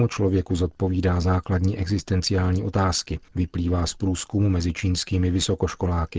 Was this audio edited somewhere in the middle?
yes; 1 cut; at 3.3 s

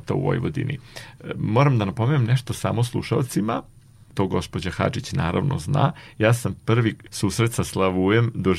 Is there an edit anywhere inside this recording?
no; 0 cuts

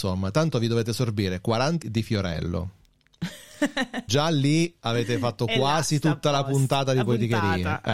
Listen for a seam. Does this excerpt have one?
yes; 2 cuts; at 1.8 s, 4.1 s

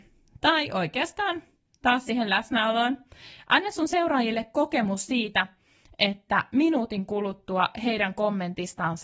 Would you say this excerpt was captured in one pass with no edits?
yes; 0 cuts

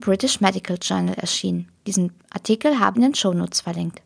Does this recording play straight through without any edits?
no; 2 cuts; at 1.8 s, 2.9 s

